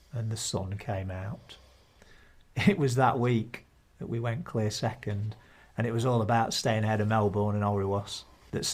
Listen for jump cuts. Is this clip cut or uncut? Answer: uncut